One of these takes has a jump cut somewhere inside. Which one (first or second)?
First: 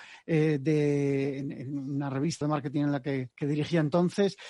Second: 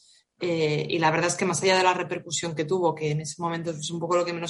first